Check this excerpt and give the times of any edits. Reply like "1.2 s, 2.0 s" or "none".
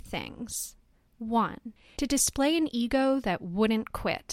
none